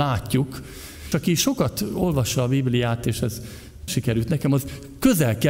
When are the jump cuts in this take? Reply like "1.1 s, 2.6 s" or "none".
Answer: 1.1 s, 3.9 s